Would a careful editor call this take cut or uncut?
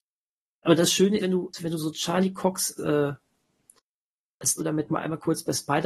cut